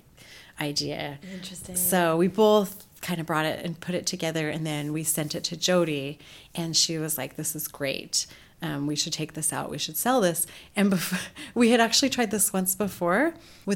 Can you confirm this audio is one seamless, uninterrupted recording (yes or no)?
yes